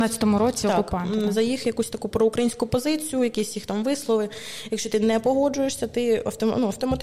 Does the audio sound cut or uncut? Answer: uncut